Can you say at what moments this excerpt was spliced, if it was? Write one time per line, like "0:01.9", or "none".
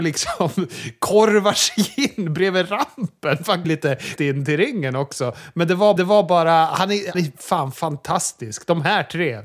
0:03.6
0:04.2
0:06.0
0:07.1